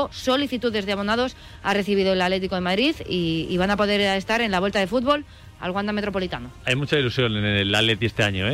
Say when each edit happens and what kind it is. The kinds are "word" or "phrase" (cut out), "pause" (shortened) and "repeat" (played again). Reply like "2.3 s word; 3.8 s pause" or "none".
none